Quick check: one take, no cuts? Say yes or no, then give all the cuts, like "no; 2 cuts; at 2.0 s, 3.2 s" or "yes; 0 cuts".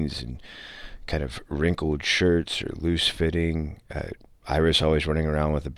yes; 0 cuts